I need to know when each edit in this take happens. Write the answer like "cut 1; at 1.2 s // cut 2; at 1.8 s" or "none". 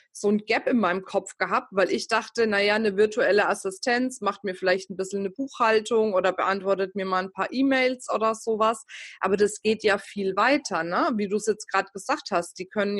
none